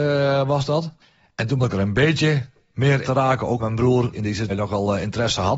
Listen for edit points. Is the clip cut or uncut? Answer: cut